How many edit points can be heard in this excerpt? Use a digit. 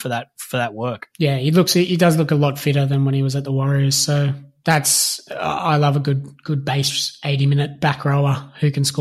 1